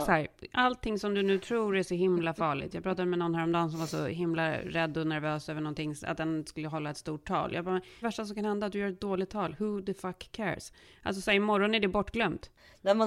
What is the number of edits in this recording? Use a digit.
1